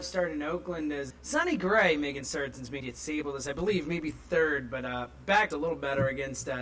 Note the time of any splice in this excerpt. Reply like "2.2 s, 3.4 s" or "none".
1.1 s, 2.2 s, 2.8 s, 5.5 s